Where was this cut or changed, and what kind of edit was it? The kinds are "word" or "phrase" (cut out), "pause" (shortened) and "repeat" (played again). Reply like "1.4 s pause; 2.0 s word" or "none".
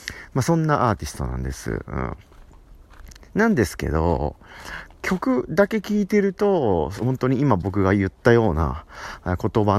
4.9 s phrase